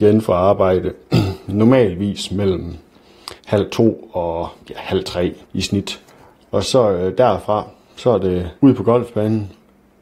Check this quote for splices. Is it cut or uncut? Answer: cut